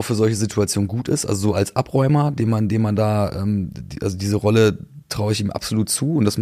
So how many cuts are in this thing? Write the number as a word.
zero